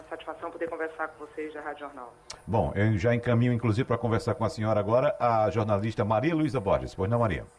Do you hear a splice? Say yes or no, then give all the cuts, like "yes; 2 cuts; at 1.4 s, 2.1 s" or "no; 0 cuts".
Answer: no; 0 cuts